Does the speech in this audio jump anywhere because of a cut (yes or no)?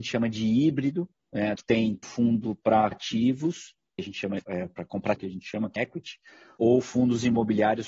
yes